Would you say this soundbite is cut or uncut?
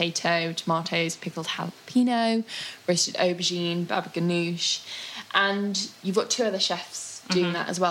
uncut